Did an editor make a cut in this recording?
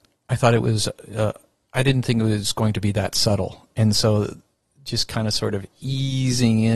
no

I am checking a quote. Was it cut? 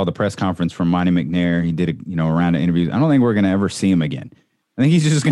no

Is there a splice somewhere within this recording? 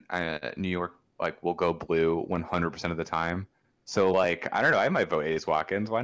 no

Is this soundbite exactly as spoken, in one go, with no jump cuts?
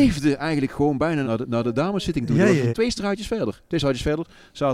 no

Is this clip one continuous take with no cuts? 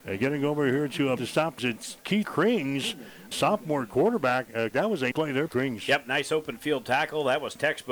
no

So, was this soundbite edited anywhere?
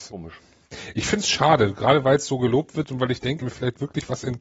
yes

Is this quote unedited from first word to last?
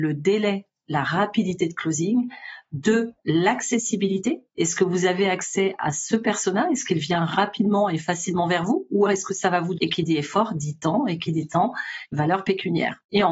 no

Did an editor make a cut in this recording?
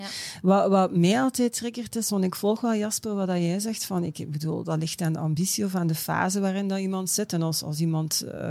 no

